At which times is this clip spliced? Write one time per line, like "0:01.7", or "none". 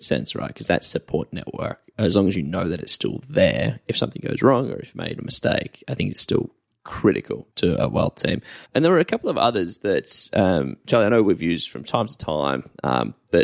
0:07.5
0:08.7